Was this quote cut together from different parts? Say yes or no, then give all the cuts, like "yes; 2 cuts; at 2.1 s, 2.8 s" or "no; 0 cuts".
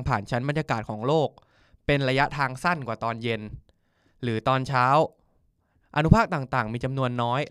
no; 0 cuts